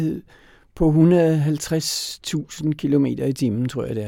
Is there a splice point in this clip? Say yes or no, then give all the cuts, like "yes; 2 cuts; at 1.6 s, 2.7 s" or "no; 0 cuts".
no; 0 cuts